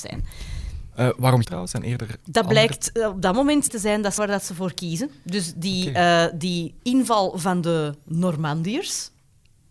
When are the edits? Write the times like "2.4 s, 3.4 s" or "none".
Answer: 1.4 s, 2.2 s, 3.7 s, 4.2 s, 6.8 s